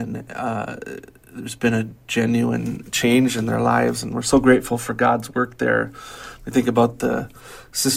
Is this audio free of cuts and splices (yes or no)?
yes